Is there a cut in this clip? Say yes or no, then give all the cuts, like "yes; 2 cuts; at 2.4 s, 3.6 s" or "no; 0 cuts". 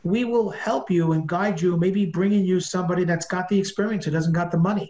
no; 0 cuts